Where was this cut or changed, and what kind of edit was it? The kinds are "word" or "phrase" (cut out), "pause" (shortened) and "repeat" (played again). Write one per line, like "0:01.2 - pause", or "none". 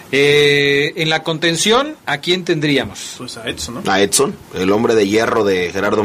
0:02.0 - pause
0:04.4 - pause